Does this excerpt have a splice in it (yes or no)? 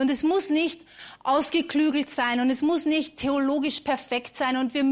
no